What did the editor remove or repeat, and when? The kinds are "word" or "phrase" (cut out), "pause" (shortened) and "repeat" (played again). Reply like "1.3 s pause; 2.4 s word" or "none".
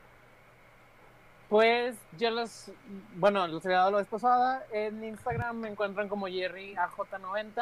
none